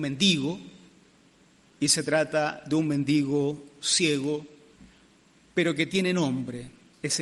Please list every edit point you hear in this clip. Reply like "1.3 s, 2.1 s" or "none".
none